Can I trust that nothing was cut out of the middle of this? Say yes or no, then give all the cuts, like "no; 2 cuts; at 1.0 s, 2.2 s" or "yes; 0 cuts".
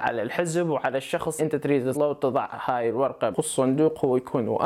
no; 3 cuts; at 1.4 s, 1.9 s, 3.3 s